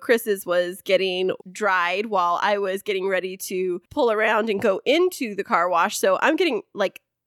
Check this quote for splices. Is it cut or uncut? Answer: cut